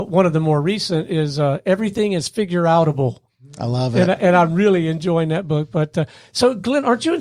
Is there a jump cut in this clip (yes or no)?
no